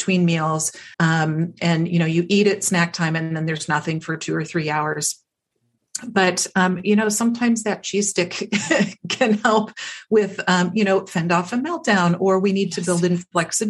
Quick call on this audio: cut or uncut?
cut